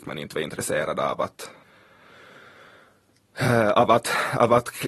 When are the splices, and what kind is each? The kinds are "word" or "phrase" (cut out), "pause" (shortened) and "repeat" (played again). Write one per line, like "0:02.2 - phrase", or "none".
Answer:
none